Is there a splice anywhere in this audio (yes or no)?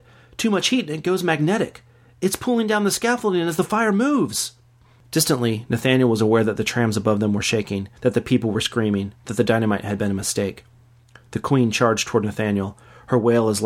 no